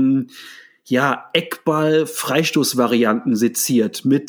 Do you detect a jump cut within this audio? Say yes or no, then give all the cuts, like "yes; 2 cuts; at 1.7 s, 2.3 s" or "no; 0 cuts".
no; 0 cuts